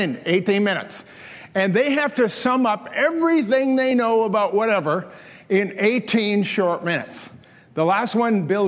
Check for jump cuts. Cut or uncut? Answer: uncut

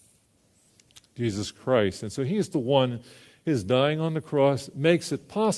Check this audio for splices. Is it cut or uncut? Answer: uncut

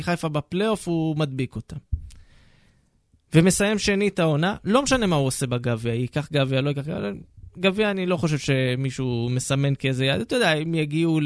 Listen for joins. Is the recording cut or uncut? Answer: uncut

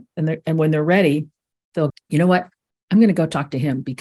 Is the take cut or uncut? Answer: cut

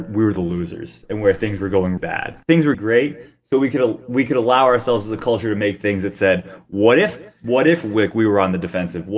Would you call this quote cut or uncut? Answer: cut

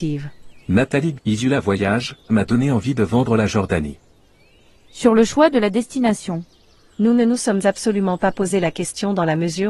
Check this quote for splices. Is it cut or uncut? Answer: cut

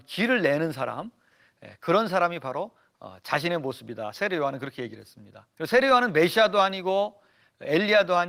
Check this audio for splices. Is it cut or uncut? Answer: cut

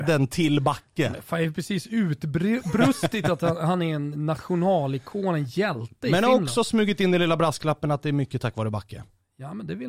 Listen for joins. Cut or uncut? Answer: uncut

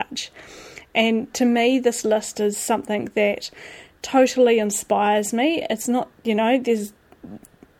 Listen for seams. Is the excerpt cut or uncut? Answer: uncut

